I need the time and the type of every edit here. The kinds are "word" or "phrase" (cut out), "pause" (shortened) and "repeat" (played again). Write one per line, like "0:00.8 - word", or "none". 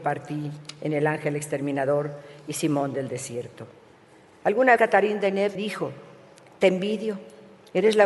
0:04.8 - word
0:05.5 - word